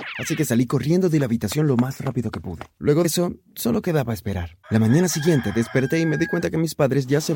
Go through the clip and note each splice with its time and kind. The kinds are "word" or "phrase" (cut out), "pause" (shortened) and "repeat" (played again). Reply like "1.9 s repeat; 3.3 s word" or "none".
3.0 s word; 4.6 s pause